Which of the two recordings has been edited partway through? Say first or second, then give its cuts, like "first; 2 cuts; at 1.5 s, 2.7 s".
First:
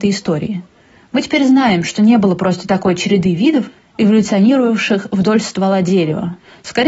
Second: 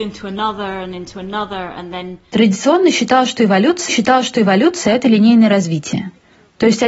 second; 1 cut; at 3.9 s